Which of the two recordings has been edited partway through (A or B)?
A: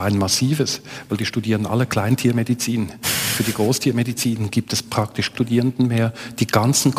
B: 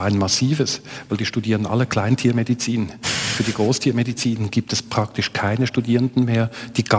A